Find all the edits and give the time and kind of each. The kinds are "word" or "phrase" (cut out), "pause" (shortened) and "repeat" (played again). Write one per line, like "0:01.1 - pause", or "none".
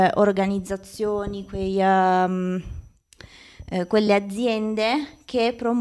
none